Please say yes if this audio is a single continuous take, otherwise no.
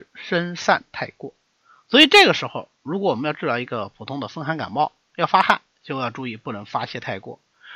yes